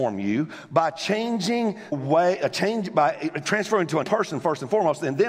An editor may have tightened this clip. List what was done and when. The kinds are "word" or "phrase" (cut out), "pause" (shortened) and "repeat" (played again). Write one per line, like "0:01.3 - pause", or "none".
0:01.9 - word
0:04.0 - word